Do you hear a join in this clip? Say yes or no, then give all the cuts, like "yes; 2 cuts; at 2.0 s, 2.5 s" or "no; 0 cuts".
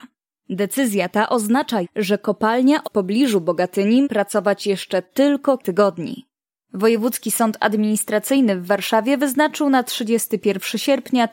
yes; 4 cuts; at 1.8 s, 2.8 s, 4.0 s, 5.6 s